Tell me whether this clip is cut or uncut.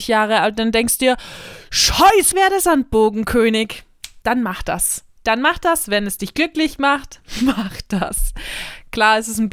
cut